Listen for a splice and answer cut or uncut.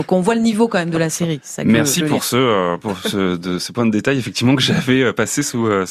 uncut